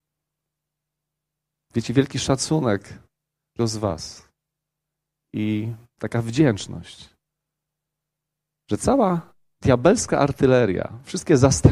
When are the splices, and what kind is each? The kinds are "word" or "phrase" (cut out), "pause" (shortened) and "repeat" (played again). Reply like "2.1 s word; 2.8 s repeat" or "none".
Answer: 3.6 s word